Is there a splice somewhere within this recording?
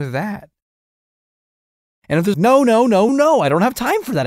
yes; 2 cuts; at 2.3 s, 3.1 s

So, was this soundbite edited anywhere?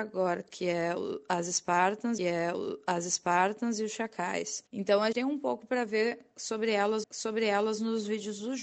yes; 4 cuts; at 2.2 s, 4.7 s, 5.1 s, 7.0 s

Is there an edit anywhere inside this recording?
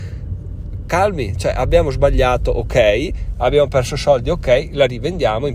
no; 0 cuts

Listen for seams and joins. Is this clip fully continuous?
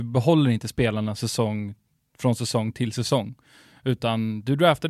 yes; 0 cuts

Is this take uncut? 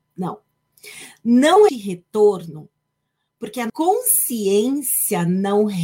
no; 2 cuts; at 1.7 s, 3.7 s

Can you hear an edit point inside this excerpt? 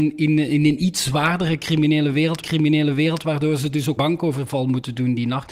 yes; 2 cuts; at 2.4 s, 4.0 s

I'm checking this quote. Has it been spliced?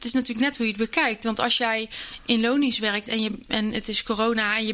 no; 0 cuts

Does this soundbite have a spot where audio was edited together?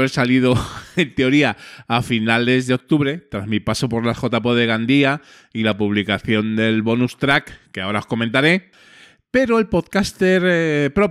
no; 0 cuts

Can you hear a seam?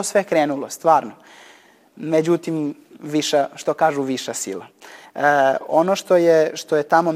no; 0 cuts

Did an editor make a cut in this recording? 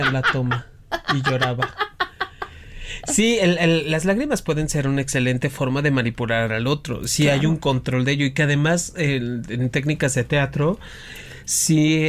no; 0 cuts

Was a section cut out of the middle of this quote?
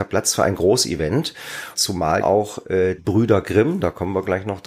yes; 3 cuts; at 1.7 s, 2.2 s, 3.0 s

